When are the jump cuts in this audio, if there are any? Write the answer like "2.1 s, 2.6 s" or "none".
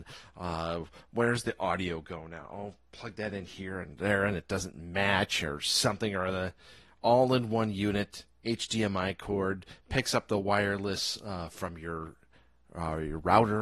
none

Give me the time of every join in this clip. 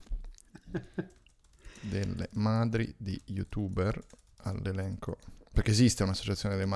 none

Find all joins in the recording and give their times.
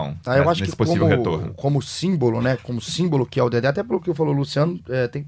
none

